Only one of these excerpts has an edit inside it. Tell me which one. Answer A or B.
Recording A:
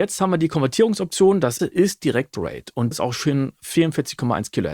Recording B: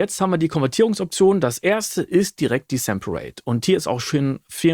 A